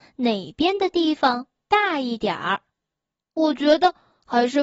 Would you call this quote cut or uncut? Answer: uncut